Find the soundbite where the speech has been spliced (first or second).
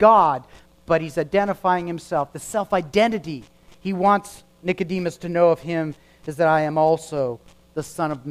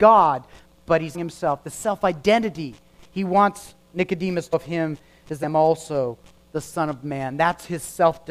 second